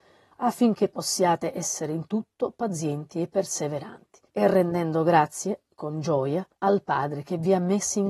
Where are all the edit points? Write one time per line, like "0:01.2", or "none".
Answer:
0:04.3
0:06.5